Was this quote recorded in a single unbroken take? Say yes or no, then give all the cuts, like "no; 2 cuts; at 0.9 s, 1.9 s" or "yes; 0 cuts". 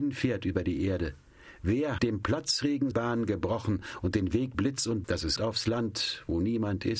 no; 5 cuts; at 2.0 s, 2.9 s, 4.5 s, 5.0 s, 5.4 s